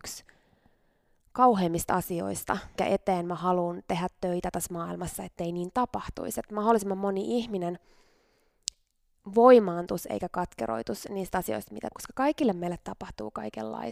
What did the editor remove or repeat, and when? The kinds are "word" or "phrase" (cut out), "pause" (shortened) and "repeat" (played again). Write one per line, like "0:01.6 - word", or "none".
0:02.8 - word
0:11.9 - word